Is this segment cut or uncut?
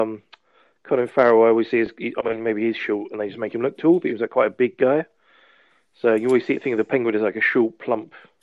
cut